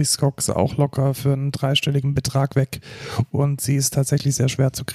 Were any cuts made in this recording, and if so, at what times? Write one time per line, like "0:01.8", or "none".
none